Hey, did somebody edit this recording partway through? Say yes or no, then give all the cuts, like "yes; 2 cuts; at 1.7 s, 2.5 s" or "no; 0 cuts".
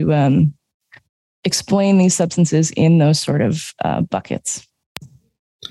no; 0 cuts